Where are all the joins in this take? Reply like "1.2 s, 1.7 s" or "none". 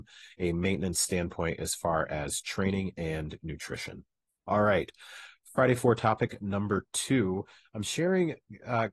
4.3 s